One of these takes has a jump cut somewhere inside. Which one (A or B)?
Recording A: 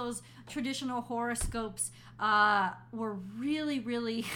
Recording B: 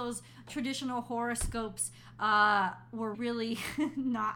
B